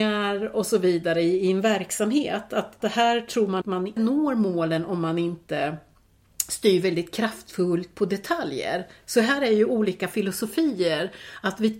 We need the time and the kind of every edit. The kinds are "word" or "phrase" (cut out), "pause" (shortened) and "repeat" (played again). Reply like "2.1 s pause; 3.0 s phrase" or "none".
2.8 s word; 3.6 s word; 4.0 s word